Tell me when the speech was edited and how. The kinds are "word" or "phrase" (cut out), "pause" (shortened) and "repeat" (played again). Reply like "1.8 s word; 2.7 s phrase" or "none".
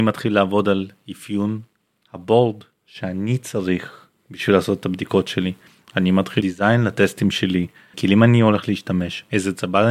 6.4 s word; 7.9 s word